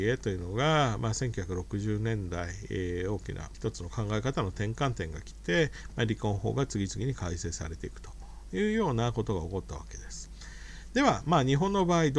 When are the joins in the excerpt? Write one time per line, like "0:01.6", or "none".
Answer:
0:03.5